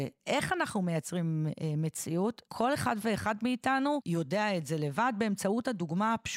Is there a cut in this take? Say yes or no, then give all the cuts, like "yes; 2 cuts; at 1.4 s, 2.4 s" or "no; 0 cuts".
no; 0 cuts